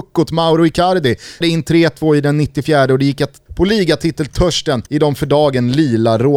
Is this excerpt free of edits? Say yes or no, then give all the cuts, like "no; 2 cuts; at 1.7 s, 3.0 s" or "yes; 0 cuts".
no; 3 cuts; at 1.4 s, 3.5 s, 4.9 s